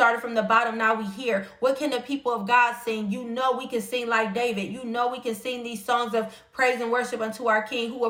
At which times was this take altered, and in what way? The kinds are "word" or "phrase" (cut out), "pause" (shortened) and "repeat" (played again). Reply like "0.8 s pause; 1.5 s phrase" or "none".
none